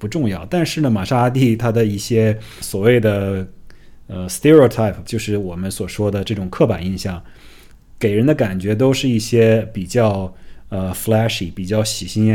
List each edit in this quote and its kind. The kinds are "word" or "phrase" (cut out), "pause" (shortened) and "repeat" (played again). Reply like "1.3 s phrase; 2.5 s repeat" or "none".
5.0 s word

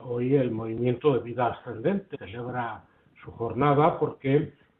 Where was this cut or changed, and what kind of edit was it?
2.1 s word

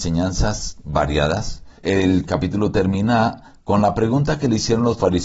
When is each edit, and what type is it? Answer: 1.8 s pause

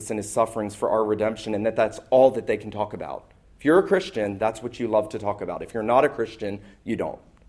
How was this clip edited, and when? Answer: none

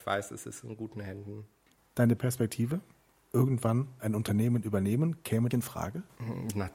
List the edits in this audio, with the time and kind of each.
2.2 s word; 4.0 s word; 5.5 s phrase

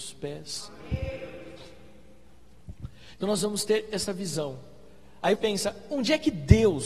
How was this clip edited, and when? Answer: 5.3 s word

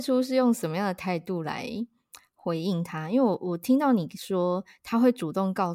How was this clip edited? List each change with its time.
none

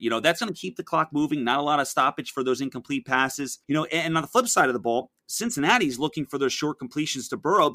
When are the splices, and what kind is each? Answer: 3.6 s pause

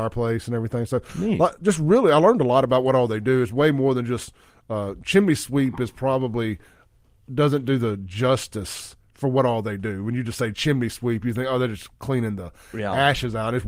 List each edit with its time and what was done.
none

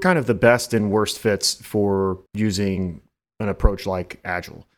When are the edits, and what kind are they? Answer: 2.3 s pause

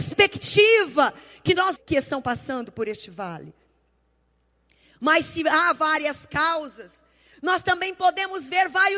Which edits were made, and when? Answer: 1.8 s phrase

